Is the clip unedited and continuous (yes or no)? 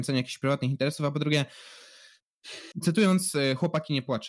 no